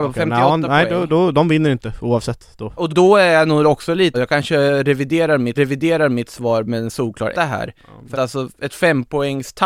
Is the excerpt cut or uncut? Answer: cut